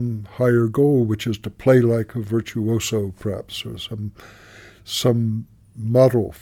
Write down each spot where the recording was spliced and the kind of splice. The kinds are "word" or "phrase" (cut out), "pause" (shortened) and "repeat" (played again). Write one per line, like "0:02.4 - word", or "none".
none